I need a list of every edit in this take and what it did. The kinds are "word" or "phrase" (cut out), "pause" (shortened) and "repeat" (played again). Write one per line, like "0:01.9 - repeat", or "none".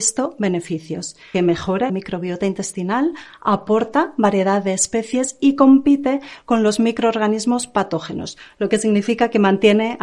0:01.3 - word
0:01.9 - phrase